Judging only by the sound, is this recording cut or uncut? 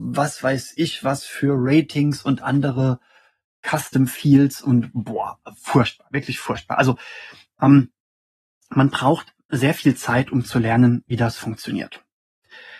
uncut